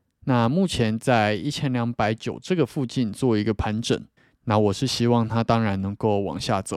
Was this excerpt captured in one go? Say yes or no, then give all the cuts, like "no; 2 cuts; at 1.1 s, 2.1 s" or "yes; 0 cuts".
no; 1 cut; at 4.2 s